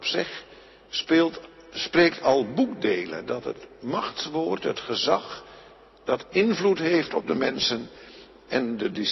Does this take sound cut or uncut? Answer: uncut